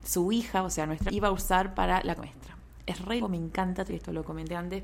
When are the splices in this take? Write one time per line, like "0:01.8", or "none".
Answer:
0:01.1
0:02.2
0:03.2
0:03.9